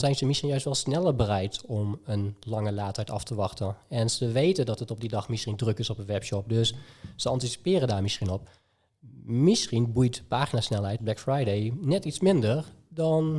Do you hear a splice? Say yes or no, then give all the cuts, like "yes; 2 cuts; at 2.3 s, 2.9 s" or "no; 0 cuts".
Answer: yes; 1 cut; at 11.0 s